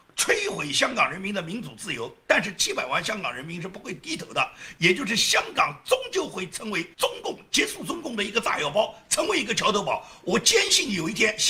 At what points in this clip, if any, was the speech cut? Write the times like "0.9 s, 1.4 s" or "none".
6.9 s

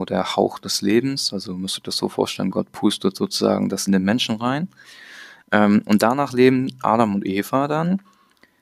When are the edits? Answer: 3.9 s

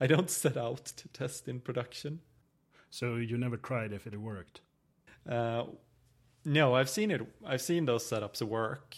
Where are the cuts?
4.1 s

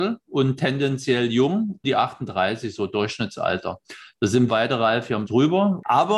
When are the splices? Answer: 1.8 s, 4.5 s, 5.2 s

